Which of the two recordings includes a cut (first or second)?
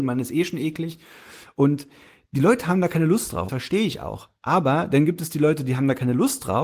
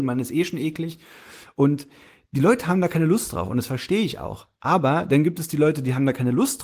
first